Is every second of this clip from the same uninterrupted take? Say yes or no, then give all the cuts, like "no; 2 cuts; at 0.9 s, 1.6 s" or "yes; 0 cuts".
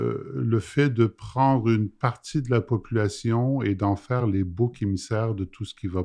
yes; 0 cuts